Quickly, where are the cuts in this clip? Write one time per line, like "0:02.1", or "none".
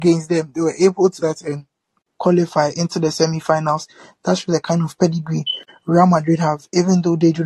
0:01.2
0:02.2